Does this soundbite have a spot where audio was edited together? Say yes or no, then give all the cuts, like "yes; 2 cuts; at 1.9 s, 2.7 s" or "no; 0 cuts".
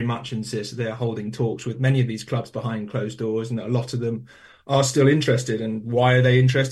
no; 0 cuts